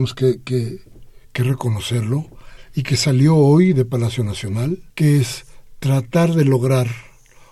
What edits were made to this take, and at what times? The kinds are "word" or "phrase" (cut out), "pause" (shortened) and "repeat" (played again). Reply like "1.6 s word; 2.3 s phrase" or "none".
1.2 s pause; 4.9 s pause